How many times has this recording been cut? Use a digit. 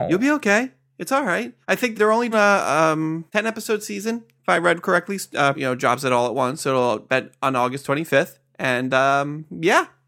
6